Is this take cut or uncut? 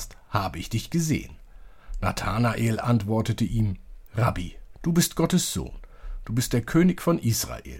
cut